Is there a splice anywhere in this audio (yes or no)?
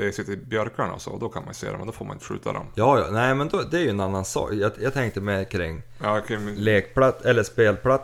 no